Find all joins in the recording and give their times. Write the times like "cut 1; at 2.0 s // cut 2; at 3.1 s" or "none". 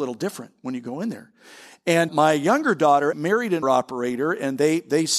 cut 1; at 2.1 s // cut 2; at 3.1 s // cut 3; at 3.6 s